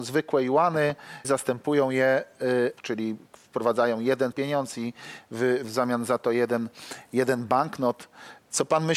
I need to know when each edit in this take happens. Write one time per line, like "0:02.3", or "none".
0:01.2
0:02.8
0:04.3
0:05.6